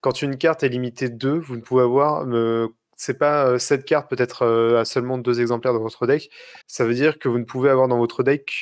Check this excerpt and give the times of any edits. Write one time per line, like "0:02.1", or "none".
0:06.6